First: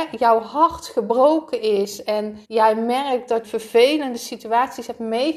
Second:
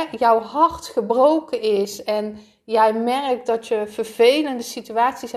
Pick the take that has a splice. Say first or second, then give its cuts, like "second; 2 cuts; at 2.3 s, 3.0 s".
first; 2 cuts; at 2.4 s, 3.4 s